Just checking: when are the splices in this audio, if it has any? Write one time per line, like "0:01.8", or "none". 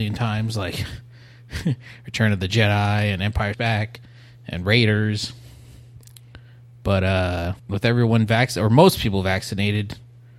0:03.5
0:07.6